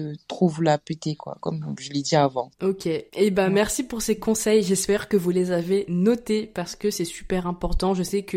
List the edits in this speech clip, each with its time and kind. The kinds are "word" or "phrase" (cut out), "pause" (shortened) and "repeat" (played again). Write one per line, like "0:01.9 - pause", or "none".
0:01.8 - word
0:03.1 - pause